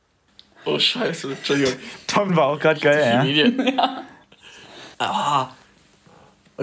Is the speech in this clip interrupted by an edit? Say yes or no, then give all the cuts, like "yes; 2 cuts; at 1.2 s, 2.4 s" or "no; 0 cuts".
yes; 2 cuts; at 2.3 s, 4.9 s